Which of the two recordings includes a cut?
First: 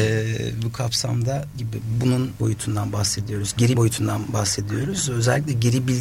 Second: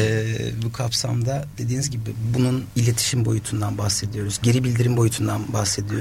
first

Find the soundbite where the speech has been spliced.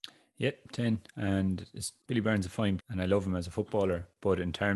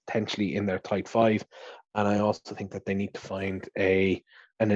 first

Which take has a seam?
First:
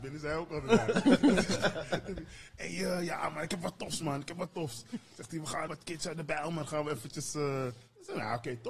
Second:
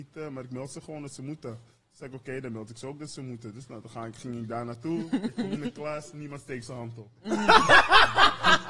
first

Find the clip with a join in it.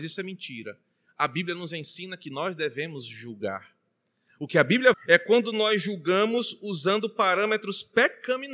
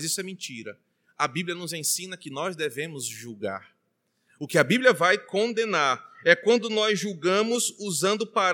first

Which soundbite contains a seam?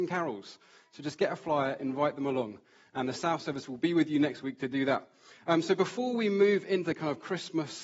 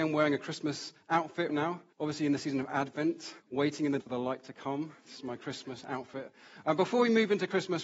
second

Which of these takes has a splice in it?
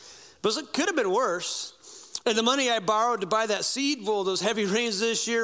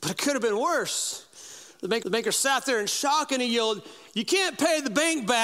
second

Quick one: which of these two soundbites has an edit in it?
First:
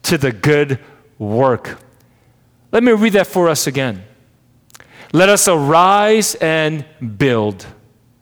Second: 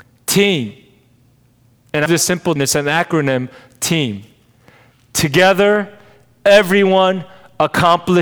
second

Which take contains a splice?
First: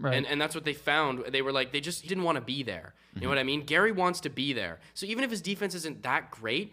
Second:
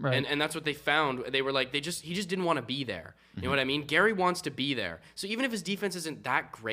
first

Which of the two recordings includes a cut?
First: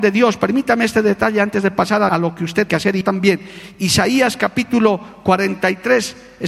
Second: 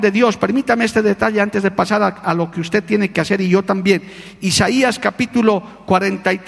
first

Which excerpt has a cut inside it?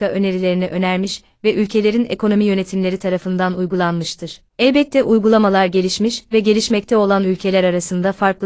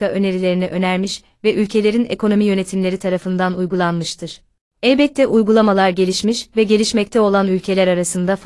first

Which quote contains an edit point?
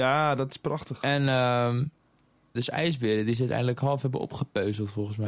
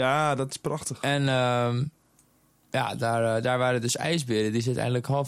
first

